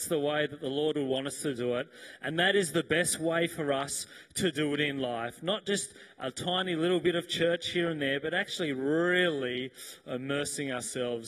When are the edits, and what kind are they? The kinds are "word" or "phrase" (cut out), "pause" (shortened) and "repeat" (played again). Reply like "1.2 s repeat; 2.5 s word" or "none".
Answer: none